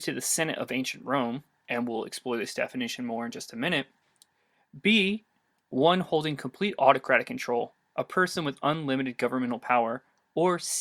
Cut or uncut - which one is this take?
uncut